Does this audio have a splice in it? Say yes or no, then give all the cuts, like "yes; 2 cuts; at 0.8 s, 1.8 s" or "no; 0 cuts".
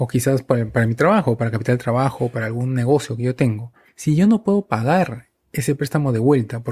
no; 0 cuts